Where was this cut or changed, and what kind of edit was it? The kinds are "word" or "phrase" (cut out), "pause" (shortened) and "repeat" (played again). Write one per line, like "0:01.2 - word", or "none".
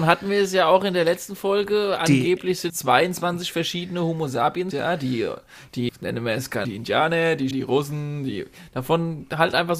0:02.7 - word
0:04.7 - word
0:05.9 - word
0:06.6 - word
0:07.5 - word

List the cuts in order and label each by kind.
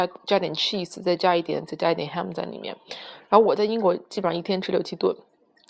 0:01.7 - word

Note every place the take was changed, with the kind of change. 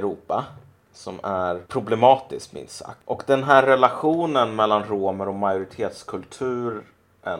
0:01.7 - pause

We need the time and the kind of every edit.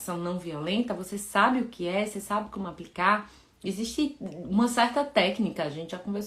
none

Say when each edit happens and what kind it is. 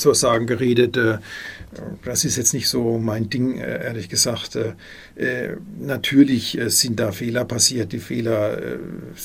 none

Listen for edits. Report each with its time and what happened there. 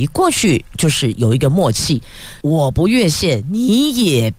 0:02.4 - phrase

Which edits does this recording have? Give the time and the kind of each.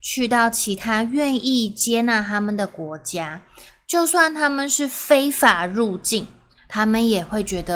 none

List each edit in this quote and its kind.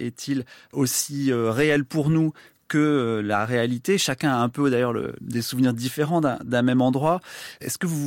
none

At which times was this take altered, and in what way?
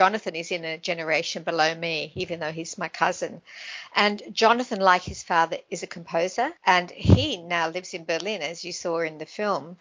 0:06.6 - pause

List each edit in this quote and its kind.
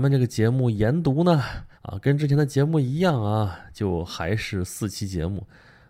0:01.7 - pause

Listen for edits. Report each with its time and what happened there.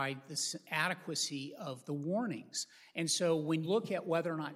0:03.6 - word

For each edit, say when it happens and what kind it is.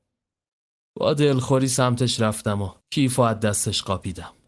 0:02.8 - pause

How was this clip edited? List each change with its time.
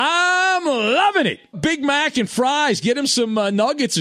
0:01.5 - phrase

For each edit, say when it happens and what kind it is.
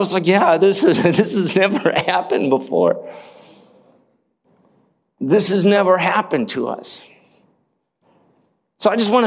none

